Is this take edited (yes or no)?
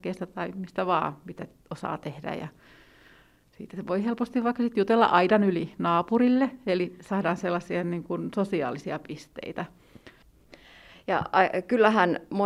no